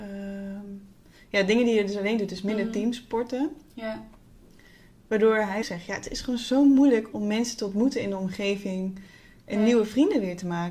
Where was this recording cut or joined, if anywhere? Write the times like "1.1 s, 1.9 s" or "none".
5.6 s, 7.1 s